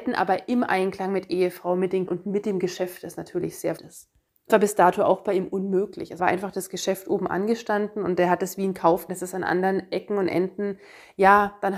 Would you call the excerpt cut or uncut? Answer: cut